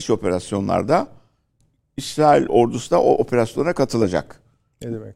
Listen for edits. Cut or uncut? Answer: uncut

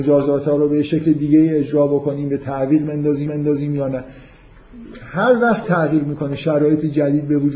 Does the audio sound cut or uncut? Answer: cut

